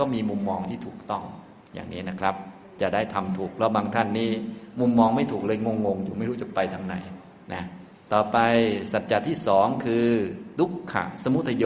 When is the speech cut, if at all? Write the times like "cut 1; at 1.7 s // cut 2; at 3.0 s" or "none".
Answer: cut 1; at 8.0 s

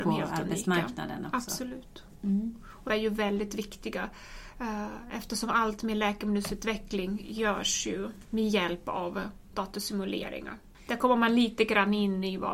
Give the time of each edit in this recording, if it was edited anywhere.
cut 1; at 2.9 s // cut 2; at 9.5 s

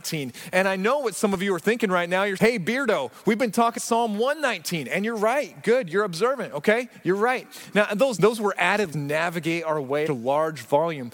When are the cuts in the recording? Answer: cut 1; at 2.4 s // cut 2; at 3.8 s // cut 3; at 8.2 s // cut 4; at 8.9 s // cut 5; at 10.1 s

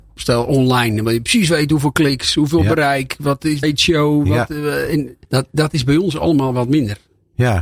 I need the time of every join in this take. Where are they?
cut 1; at 3.6 s // cut 2; at 5.2 s

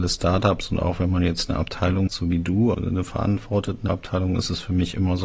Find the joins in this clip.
cut 1; at 2.1 s // cut 2; at 2.7 s // cut 3; at 3.9 s

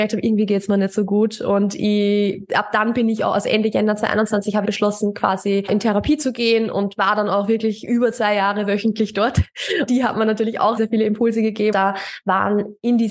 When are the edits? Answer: cut 1; at 4.6 s // cut 2; at 9.9 s // cut 3; at 10.8 s // cut 4; at 11.7 s

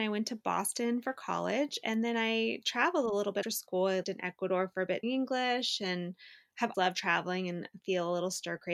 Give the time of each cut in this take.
cut 1; at 3.4 s // cut 2; at 4.0 s // cut 3; at 5.0 s // cut 4; at 6.7 s

